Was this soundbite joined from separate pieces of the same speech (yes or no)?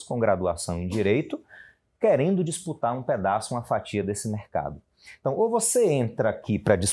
no